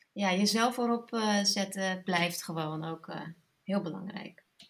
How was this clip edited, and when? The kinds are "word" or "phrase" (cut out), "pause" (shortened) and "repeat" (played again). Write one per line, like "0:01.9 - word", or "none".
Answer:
none